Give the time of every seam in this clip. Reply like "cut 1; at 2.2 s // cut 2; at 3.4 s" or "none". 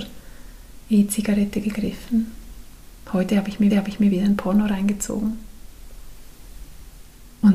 cut 1; at 3.7 s